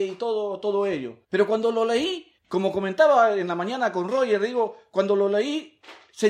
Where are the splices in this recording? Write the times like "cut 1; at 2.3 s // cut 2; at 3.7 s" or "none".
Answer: cut 1; at 1.2 s // cut 2; at 2.4 s